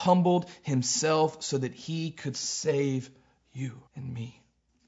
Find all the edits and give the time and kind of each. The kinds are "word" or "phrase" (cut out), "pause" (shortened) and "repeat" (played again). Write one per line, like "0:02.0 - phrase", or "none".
0:03.9 - pause